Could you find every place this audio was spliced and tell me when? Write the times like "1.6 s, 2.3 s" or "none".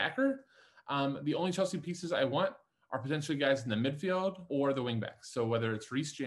4.5 s